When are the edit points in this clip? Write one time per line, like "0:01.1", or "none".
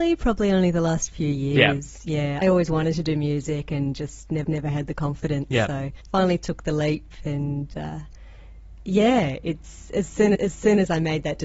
0:02.4
0:04.4
0:06.0
0:10.3